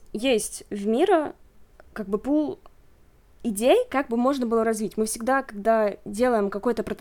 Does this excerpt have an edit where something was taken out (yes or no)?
no